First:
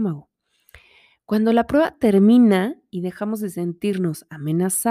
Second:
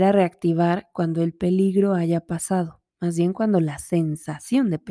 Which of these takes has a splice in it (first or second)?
second